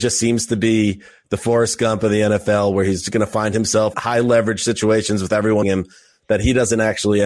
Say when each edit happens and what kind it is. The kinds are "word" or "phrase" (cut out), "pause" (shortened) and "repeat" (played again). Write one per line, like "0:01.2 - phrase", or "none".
0:03.9 - word
0:05.6 - word